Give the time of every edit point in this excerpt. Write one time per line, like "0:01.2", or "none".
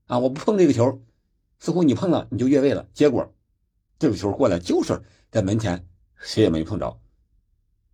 none